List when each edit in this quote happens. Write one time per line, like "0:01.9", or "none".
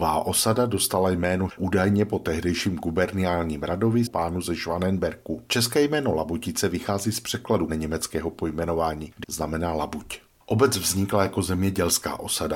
0:01.5
0:04.1
0:07.7
0:09.2